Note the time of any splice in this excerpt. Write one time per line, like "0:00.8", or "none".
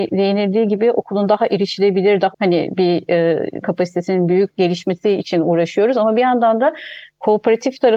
0:02.3
0:03.6